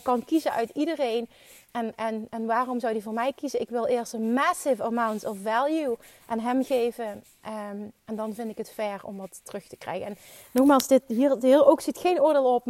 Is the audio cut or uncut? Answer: uncut